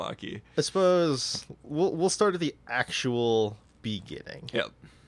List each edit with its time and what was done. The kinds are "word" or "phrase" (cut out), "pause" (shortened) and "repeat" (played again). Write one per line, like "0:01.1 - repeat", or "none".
none